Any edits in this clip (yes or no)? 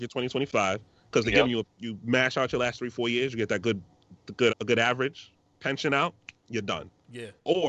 yes